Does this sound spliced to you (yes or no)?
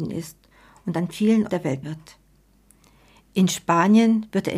yes